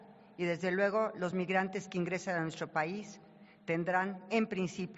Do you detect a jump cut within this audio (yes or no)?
no